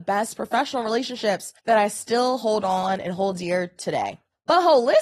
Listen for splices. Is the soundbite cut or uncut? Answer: cut